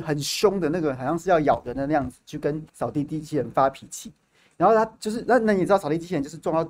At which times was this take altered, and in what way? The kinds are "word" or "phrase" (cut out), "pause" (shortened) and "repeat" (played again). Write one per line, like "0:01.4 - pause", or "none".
0:02.7 - pause